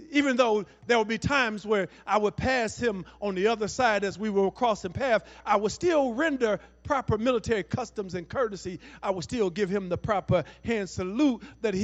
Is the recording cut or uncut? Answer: uncut